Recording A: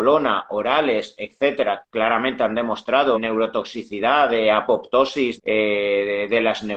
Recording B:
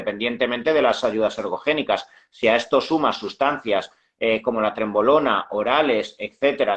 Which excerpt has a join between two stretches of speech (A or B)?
A